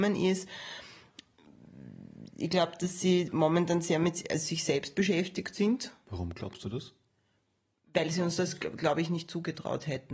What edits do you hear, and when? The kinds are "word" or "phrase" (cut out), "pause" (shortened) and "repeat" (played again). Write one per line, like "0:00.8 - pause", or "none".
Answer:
none